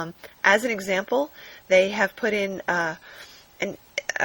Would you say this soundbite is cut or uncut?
uncut